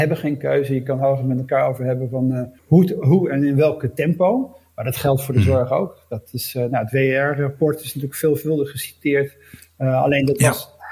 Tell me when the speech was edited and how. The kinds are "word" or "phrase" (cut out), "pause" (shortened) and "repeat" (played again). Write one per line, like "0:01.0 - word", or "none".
0:02.6 - pause